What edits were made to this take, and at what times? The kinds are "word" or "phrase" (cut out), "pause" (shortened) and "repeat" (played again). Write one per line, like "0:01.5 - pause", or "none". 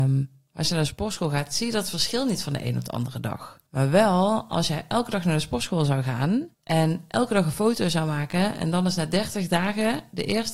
0:03.7 - pause
0:06.5 - pause